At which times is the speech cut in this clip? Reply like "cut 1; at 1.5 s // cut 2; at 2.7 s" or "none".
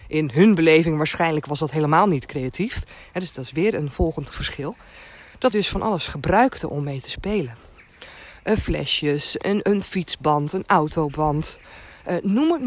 cut 1; at 4.3 s // cut 2; at 5.5 s // cut 3; at 9.4 s